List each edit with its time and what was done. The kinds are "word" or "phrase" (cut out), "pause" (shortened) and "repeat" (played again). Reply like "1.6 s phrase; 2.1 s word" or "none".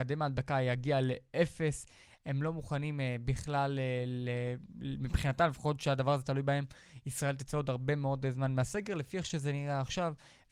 none

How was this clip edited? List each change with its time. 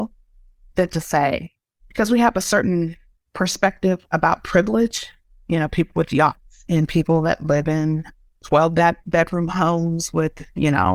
none

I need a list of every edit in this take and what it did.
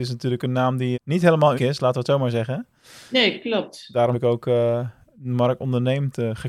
0.9 s word; 1.6 s word; 4.1 s word

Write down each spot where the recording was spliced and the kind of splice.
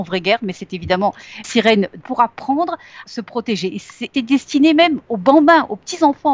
1.4 s word; 2.0 s word; 3.0 s word; 4.1 s word; 5.1 s word

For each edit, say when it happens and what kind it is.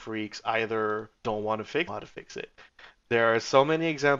1.2 s pause; 1.9 s phrase

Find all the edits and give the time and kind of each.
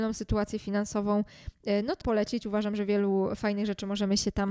2.0 s word

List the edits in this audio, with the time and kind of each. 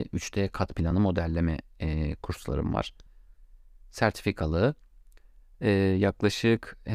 none

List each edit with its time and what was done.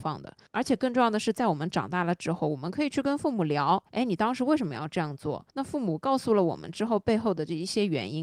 3.9 s pause; 5.5 s pause

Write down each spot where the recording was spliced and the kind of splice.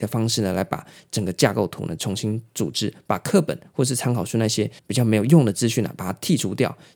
4.8 s pause

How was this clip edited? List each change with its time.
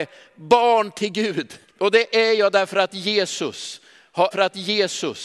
1.7 s pause; 4.3 s repeat

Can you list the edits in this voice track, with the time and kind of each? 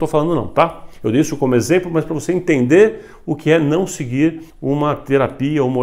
4.5 s pause

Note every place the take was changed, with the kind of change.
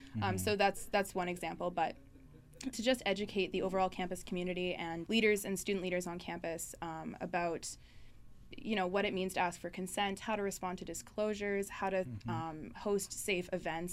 2.7 s word; 5.0 s word; 8.5 s word

